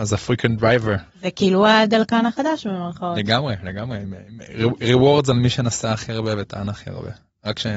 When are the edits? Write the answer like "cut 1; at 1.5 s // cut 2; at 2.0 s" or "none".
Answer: cut 1; at 1.1 s